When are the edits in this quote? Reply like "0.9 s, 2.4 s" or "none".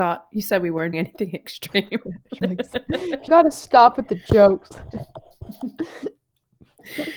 0.9 s, 2.4 s, 3.3 s